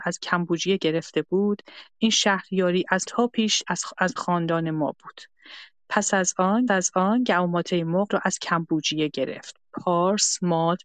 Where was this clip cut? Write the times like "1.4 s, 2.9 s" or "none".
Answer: 3.1 s, 4.2 s, 6.7 s, 8.1 s